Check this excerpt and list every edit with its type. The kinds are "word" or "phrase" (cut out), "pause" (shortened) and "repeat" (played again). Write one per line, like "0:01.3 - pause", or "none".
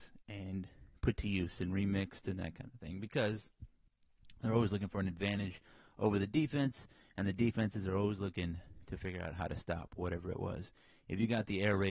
none